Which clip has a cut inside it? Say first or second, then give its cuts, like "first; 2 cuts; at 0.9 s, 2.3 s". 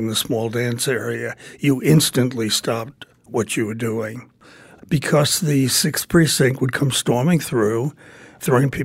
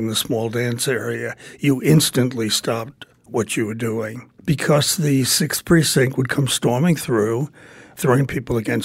second; 1 cut; at 4.4 s